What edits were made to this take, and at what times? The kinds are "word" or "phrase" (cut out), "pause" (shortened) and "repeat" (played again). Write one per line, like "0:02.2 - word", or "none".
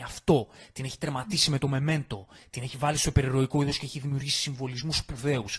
none